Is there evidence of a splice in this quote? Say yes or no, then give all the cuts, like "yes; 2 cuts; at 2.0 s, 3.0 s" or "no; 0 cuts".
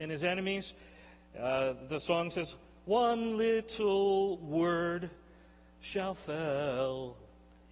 no; 0 cuts